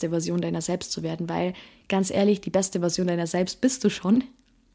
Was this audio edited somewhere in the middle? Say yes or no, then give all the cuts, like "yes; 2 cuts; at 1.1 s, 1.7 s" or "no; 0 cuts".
no; 0 cuts